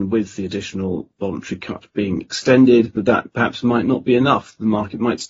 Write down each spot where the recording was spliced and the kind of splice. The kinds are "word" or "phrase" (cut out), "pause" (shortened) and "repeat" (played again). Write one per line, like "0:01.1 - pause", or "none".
none